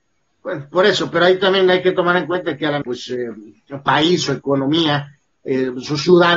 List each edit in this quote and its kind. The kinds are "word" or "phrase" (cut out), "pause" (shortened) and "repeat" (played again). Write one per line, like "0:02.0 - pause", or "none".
0:02.8 - phrase